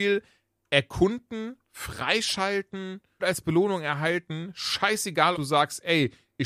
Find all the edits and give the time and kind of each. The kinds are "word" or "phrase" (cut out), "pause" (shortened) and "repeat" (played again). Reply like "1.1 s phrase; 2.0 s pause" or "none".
3.2 s word; 5.3 s word